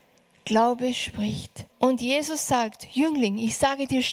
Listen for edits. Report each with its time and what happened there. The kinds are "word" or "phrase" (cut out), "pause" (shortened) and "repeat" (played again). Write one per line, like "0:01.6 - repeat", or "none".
0:01.7 - pause